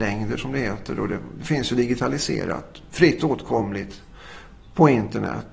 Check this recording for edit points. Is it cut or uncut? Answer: uncut